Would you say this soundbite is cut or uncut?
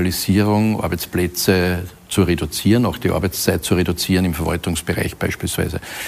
uncut